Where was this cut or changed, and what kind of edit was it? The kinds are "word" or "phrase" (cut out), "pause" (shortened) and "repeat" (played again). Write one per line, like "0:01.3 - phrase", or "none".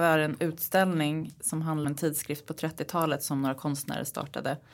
0:01.8 - word